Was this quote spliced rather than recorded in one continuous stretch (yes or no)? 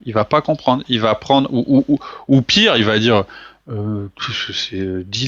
no